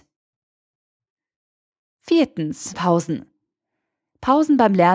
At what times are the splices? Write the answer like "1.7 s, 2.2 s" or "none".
2.7 s